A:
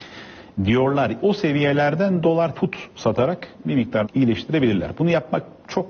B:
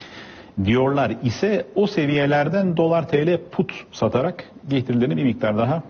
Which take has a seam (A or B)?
A